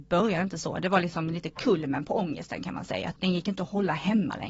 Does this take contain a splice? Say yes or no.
yes